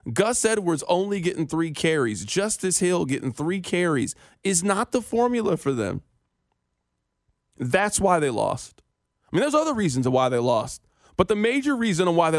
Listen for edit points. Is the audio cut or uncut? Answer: uncut